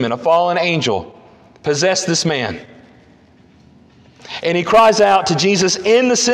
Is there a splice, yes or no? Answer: no